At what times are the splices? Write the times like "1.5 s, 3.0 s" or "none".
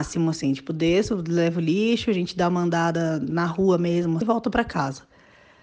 4.2 s